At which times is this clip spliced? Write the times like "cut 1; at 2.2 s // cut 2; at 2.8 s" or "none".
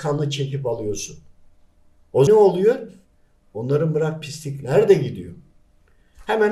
cut 1; at 2.3 s // cut 2; at 4.2 s